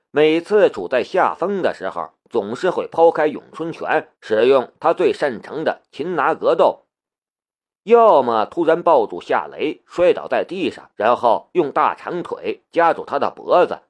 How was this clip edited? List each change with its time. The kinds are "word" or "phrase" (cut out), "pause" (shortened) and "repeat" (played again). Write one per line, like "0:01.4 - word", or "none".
0:04.1 - pause
0:10.9 - pause